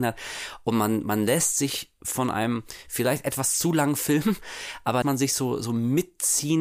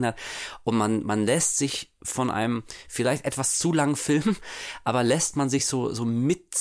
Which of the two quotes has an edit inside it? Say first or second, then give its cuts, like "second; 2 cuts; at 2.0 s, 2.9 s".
first; 1 cut; at 5.0 s